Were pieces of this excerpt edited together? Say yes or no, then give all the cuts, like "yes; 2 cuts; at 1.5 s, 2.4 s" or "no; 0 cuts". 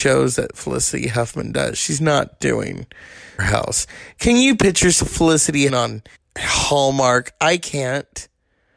yes; 3 cuts; at 3.4 s, 5.7 s, 6.1 s